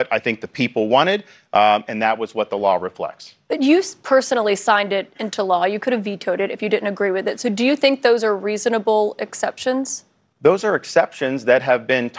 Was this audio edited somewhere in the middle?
no; 0 cuts

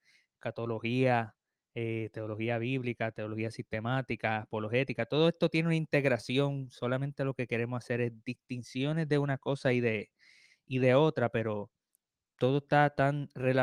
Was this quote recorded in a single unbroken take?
yes; 0 cuts

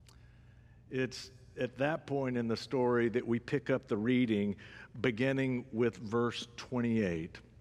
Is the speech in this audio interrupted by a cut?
no; 0 cuts

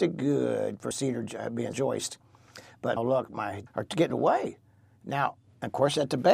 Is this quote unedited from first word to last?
no; 5 cuts; at 0.9 s, 1.7 s, 3.0 s, 3.7 s, 4.1 s

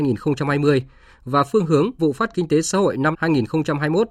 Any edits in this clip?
yes; 3 cuts; at 2.0 s, 2.3 s, 3.1 s

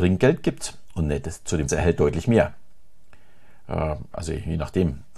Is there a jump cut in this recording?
yes; 1 cut; at 1.7 s

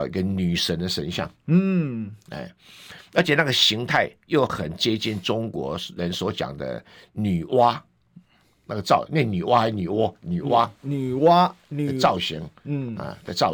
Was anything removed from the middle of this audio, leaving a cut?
no; 0 cuts

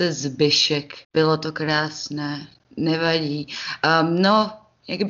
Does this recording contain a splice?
yes; 1 cut; at 1.0 s

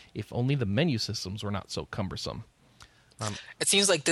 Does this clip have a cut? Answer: no; 0 cuts

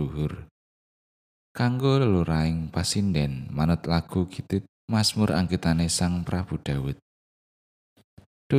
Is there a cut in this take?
yes; 1 cut; at 4.7 s

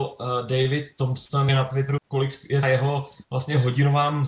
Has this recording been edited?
yes; 3 cuts; at 1.5 s, 2.0 s, 2.6 s

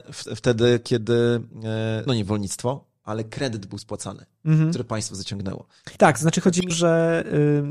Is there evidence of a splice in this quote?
yes; 3 cuts; at 2.1 s, 6.0 s, 6.7 s

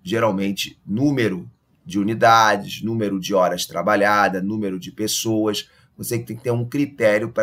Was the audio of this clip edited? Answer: no; 0 cuts

